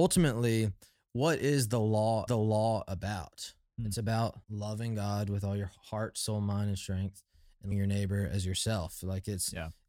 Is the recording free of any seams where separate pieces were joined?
no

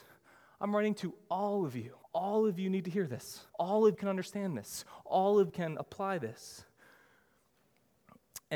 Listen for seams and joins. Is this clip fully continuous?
no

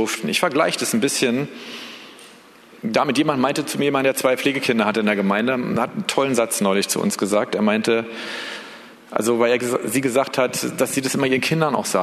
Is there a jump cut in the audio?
no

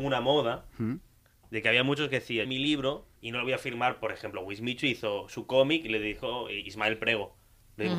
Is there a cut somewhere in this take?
yes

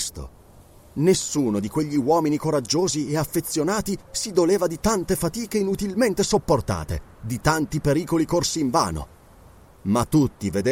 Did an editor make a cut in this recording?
no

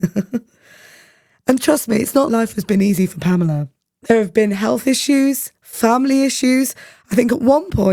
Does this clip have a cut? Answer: yes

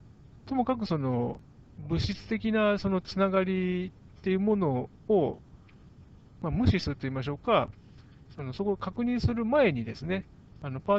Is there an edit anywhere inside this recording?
no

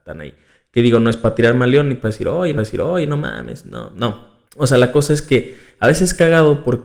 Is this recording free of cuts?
no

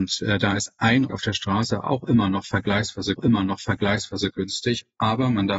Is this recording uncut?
no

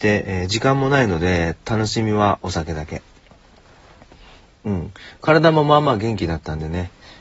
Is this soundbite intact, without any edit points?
yes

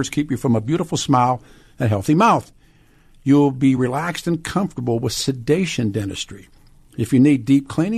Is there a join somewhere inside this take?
no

